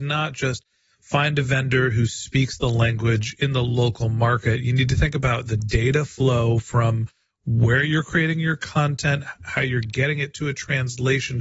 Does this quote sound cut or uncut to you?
uncut